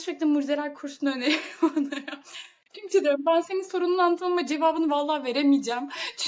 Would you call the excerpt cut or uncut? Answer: uncut